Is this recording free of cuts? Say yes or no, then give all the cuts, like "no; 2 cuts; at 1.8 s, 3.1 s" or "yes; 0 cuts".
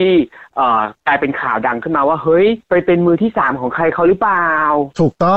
no; 1 cut; at 2.6 s